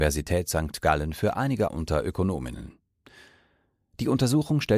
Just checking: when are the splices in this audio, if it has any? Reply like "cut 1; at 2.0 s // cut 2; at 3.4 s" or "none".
cut 1; at 1.7 s

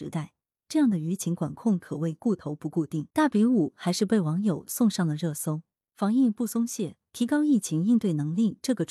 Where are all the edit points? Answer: cut 1; at 3.1 s

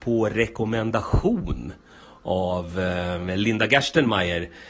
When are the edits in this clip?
none

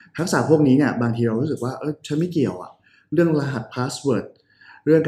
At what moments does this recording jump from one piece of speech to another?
none

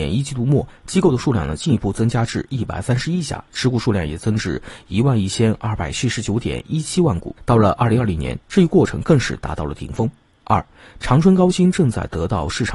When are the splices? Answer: cut 1; at 7.4 s

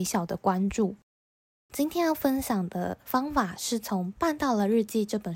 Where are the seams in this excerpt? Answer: none

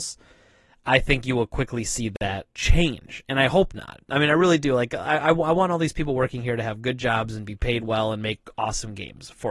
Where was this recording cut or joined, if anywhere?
cut 1; at 2.5 s

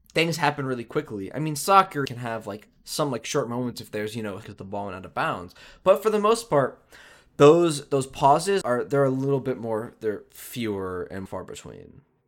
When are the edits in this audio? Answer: cut 1; at 2.1 s // cut 2; at 4.4 s // cut 3; at 8.6 s // cut 4; at 11.3 s

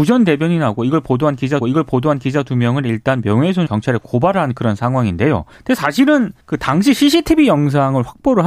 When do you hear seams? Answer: cut 1; at 1.6 s // cut 2; at 3.7 s // cut 3; at 5.5 s // cut 4; at 6.4 s

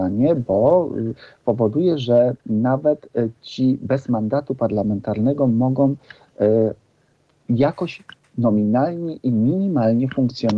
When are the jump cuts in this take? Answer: none

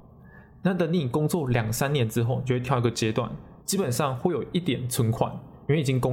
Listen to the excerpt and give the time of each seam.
cut 1; at 3.6 s

